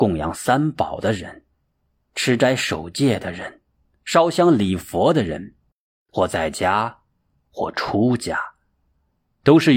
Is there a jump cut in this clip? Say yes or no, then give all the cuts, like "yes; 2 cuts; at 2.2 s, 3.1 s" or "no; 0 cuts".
no; 0 cuts